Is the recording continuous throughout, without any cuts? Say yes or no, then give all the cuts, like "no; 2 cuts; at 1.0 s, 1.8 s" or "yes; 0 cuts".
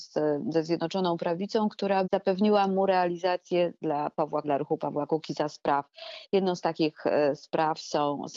no; 3 cuts; at 2.0 s, 3.8 s, 4.4 s